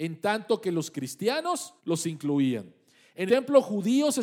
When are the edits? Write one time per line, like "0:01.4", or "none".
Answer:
0:01.8
0:03.3